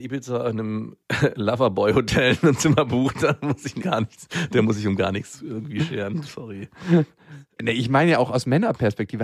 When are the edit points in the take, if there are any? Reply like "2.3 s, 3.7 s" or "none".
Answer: 1.0 s, 3.8 s, 7.6 s